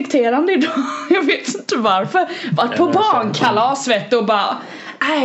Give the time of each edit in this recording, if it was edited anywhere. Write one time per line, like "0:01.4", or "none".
none

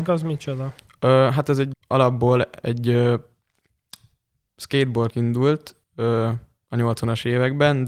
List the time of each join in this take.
0:01.7
0:05.1
0:05.8

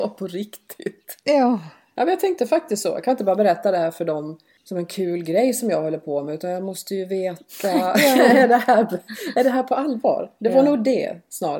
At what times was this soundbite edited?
none

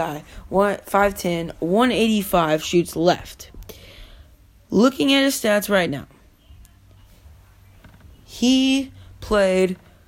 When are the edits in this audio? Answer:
none

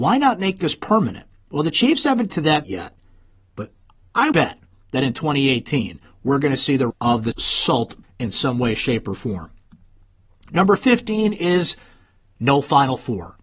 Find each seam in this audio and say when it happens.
0:02.3
0:02.6
0:04.3
0:06.9
0:07.3
0:08.0

